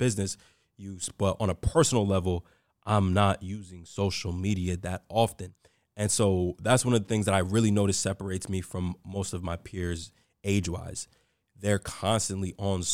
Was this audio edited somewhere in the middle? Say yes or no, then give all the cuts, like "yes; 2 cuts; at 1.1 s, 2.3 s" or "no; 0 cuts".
no; 0 cuts